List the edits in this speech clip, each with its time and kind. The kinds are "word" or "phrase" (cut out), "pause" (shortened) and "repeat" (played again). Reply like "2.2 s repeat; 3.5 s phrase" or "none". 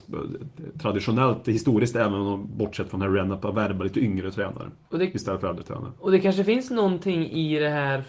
none